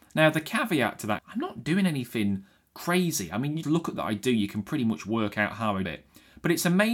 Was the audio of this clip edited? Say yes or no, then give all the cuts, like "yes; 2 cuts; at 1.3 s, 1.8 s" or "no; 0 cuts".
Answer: yes; 4 cuts; at 1.2 s, 3.6 s, 4.0 s, 5.8 s